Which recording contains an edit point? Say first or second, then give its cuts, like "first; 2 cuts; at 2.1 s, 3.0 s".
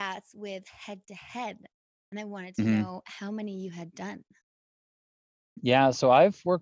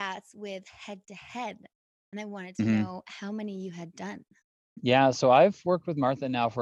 second; 1 cut; at 4.5 s